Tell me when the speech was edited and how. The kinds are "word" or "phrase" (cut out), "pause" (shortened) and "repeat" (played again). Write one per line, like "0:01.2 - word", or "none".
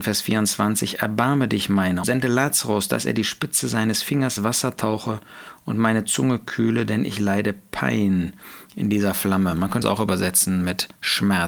0:02.0 - word
0:04.4 - word
0:09.8 - word